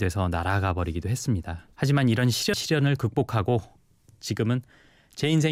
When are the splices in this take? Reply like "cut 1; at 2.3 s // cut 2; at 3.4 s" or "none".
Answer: cut 1; at 1.7 s // cut 2; at 2.5 s